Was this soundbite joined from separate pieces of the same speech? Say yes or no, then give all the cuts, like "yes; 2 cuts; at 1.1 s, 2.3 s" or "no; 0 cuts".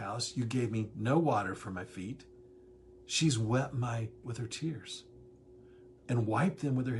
yes; 1 cut; at 4.2 s